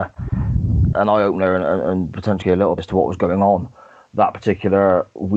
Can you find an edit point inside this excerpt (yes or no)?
yes